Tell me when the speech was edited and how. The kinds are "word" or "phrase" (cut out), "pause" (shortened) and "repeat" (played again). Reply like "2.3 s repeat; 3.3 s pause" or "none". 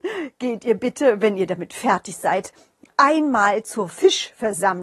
none

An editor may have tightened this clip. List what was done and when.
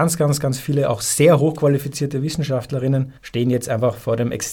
3.2 s pause

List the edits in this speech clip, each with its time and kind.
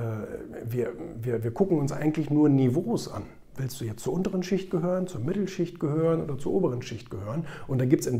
none

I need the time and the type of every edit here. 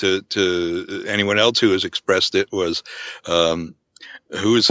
none

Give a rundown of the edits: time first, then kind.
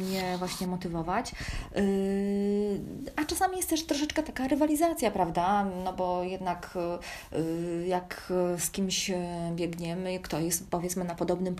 none

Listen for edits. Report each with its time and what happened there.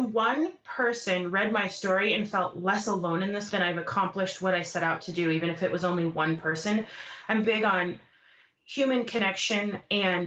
3.5 s word; 7.4 s word

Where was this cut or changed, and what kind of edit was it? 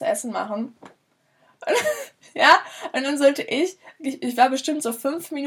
none

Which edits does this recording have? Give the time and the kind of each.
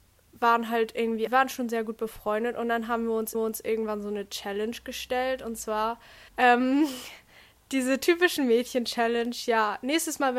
1.3 s word; 3.3 s repeat; 6.3 s pause

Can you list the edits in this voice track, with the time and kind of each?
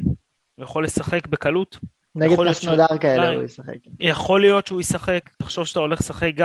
2.0 s pause; 5.3 s pause

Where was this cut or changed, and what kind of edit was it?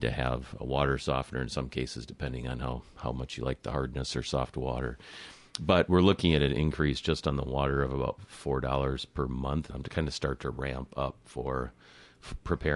9.7 s phrase

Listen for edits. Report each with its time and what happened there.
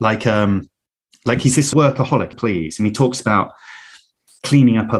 1.7 s word; 2.3 s phrase

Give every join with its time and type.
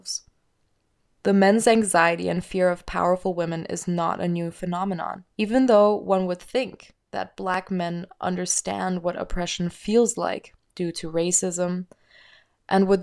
5.3 s pause

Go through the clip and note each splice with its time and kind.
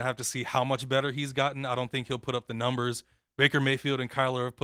none

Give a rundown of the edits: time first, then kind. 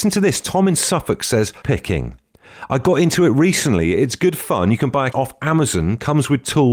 1.6 s word; 5.1 s word

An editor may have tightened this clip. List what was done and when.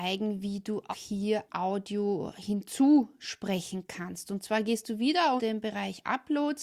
0.9 s word; 1.5 s word; 5.4 s word

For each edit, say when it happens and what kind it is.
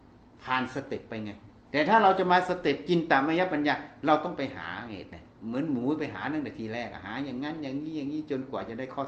1.6 s pause; 5.3 s pause

